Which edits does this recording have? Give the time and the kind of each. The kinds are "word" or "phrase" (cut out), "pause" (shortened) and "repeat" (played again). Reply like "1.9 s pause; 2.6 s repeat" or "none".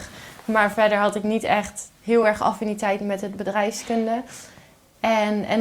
none